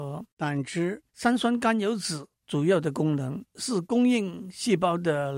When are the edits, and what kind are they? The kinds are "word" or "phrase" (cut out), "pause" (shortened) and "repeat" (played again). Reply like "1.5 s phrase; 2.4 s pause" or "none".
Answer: 1.1 s pause; 2.3 s pause; 3.5 s pause